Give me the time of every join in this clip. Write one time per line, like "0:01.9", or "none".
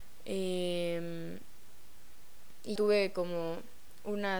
0:02.8